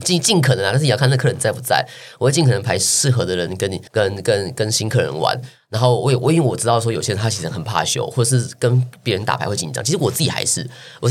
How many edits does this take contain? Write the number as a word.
one